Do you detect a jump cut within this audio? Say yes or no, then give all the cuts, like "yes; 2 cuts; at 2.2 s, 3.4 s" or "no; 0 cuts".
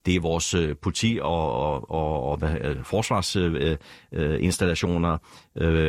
no; 0 cuts